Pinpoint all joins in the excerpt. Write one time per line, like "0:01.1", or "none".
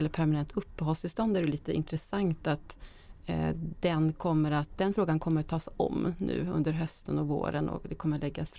none